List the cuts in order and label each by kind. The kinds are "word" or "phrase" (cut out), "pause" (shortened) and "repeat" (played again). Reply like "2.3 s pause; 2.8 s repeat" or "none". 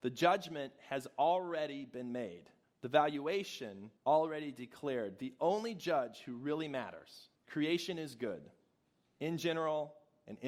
2.6 s pause; 4.0 s pause; 7.4 s pause

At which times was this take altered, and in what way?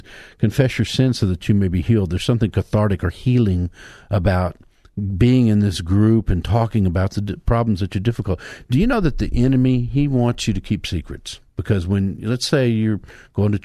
11.5 s pause

